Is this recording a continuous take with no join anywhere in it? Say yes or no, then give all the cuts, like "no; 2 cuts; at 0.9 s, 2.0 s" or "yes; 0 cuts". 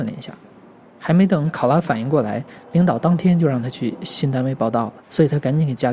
no; 1 cut; at 5.0 s